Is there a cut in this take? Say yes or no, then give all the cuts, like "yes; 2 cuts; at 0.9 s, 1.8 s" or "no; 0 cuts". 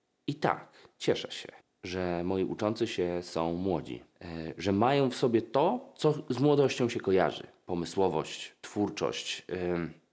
yes; 2 cuts; at 1.6 s, 4.1 s